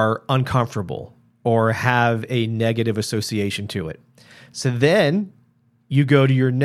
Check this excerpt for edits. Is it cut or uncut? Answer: uncut